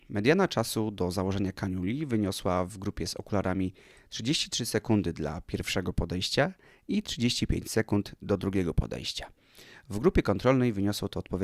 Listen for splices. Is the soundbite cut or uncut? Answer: uncut